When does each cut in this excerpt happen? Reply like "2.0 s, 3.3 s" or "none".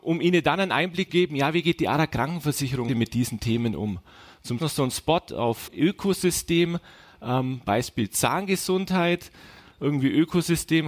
1.1 s, 2.9 s, 4.6 s, 5.7 s

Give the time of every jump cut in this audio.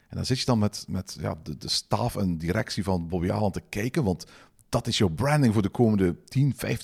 none

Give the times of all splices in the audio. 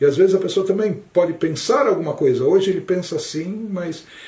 none

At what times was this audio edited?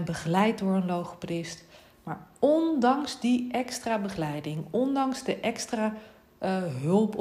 none

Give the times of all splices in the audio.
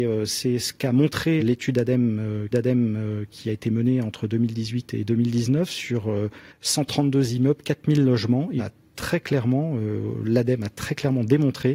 1.4 s, 2.5 s, 6.5 s, 8.6 s

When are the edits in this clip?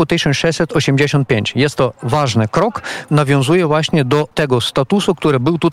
1.9 s, 3.1 s, 4.3 s

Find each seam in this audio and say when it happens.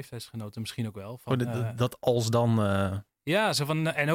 none

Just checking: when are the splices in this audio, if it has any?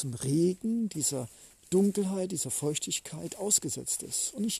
none

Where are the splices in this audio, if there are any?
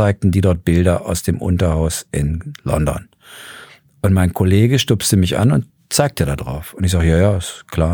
none

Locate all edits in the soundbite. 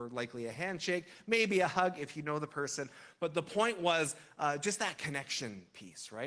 none

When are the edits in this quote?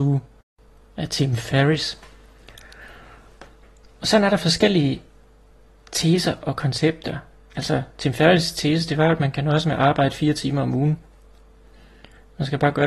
none

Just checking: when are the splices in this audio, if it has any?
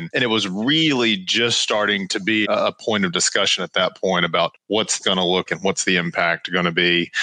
2.4 s, 5.0 s, 5.5 s

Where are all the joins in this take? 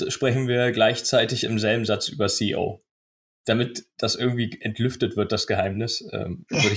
none

